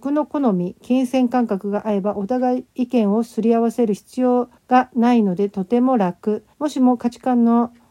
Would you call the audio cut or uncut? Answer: cut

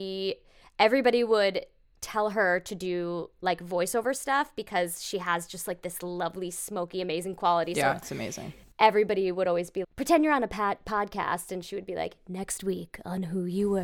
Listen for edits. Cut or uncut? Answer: cut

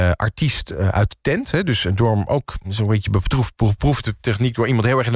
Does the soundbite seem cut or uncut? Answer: uncut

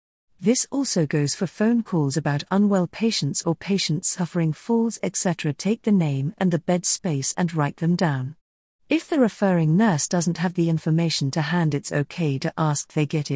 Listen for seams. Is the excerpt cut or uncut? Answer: uncut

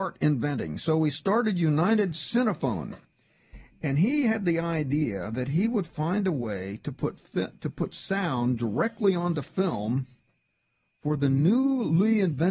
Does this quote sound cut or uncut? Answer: uncut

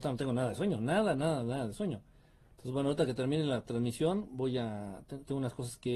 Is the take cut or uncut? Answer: uncut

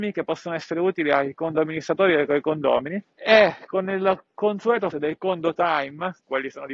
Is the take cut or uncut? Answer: cut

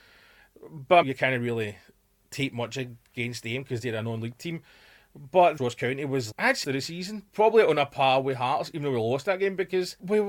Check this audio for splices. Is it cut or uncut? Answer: cut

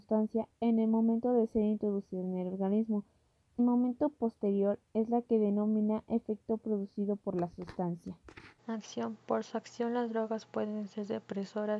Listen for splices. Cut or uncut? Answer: cut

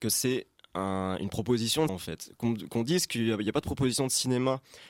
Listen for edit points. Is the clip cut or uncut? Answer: cut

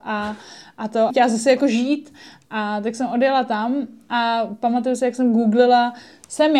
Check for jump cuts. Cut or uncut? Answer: cut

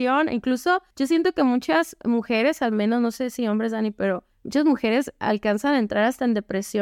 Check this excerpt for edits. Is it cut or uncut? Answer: cut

